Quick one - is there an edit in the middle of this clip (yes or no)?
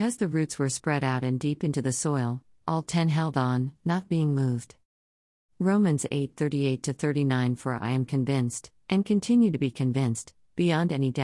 no